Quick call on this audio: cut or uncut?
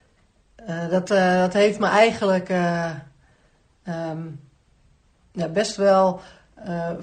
uncut